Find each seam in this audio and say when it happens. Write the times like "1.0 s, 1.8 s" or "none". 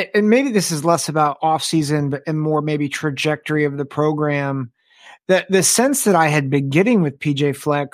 none